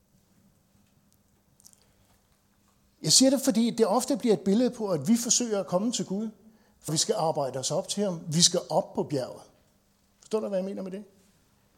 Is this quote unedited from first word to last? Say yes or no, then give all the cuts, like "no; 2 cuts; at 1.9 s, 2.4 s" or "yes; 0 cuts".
no; 1 cut; at 6.9 s